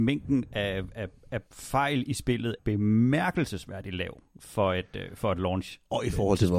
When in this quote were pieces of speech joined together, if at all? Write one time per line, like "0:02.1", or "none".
0:01.5
0:02.6